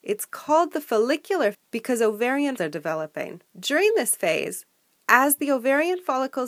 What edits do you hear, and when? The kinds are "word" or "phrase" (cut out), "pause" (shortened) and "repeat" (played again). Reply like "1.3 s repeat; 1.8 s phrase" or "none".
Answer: 1.5 s word; 2.6 s word; 3.5 s pause